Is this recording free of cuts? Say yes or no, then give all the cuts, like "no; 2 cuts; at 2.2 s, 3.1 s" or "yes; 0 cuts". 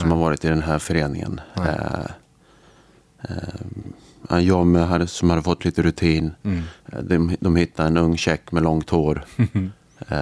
yes; 0 cuts